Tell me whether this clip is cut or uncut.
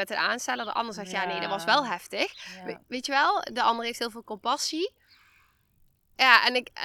uncut